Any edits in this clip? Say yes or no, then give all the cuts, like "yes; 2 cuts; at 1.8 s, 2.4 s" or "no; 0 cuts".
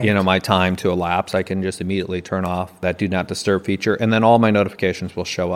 no; 0 cuts